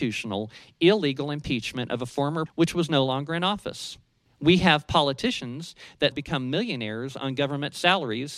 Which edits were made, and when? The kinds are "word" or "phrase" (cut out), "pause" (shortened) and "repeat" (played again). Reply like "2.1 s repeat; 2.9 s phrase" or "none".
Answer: 2.5 s word; 4.3 s pause; 6.1 s word